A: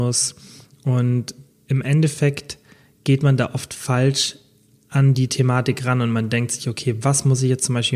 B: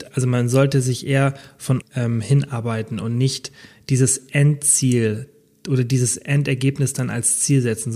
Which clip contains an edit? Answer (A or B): B